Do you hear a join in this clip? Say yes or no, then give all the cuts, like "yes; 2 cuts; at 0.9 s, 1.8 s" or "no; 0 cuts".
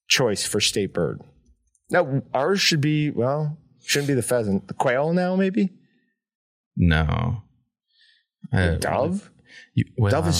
no; 0 cuts